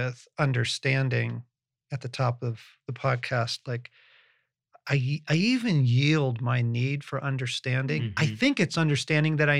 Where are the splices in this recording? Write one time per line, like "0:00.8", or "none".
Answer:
none